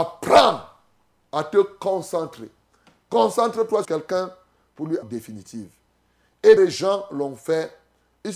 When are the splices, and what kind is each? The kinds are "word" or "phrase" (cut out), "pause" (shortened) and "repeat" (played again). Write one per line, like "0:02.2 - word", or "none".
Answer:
0:03.8 - word
0:05.0 - phrase
0:06.6 - word

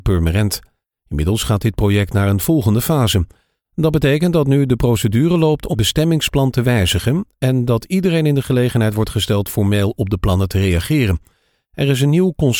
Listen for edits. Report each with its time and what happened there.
0:05.7 - word

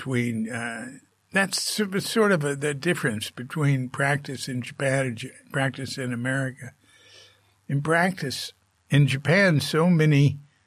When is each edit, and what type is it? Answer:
none

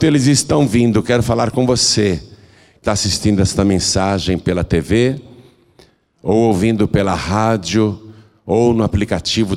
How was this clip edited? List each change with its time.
0:02.8 - word

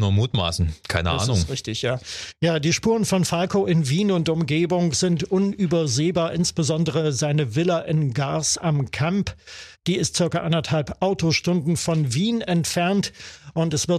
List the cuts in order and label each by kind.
none

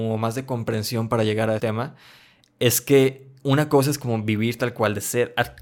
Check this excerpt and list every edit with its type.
0:01.6 - word

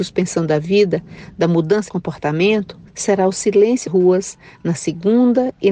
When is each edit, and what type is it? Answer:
0:01.9 - word
0:02.9 - pause
0:03.9 - word

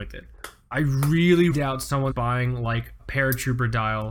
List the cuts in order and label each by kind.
0:01.5 - word
0:02.1 - word
0:03.0 - word

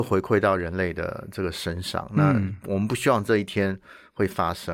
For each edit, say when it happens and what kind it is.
none

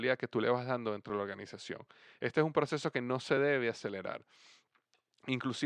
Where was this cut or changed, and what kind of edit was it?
none

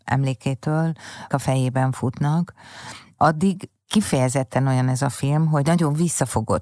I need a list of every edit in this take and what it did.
0:01.3 - phrase

